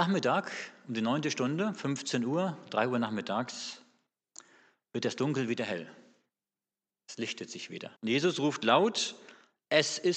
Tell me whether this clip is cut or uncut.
cut